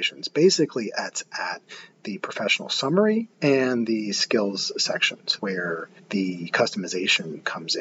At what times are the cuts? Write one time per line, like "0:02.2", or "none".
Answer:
0:03.3
0:05.4
0:06.0